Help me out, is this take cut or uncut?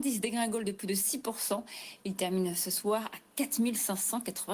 uncut